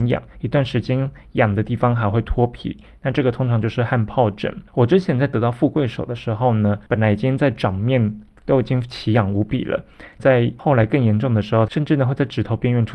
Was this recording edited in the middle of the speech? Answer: yes; 3 cuts; at 4.7 s, 6.9 s, 10.2 s

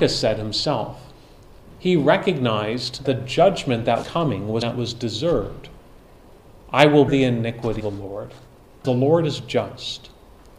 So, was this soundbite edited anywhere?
yes; 6 cuts; at 3.0 s, 4.0 s, 4.6 s, 7.1 s, 7.8 s, 8.8 s

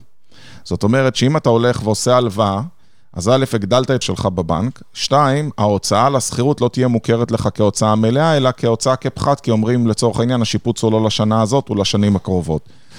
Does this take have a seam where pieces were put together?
yes; 1 cut; at 4.0 s

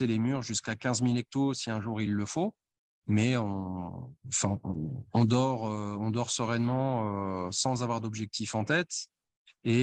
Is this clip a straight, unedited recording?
yes; 0 cuts

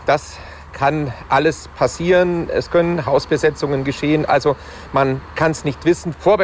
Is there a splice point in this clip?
no; 0 cuts

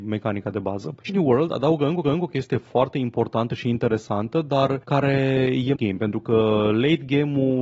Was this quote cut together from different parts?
yes; 3 cuts; at 1.1 s, 2.0 s, 5.8 s

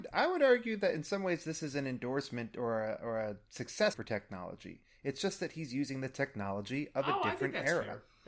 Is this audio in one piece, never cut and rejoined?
no; 1 cut; at 3.9 s

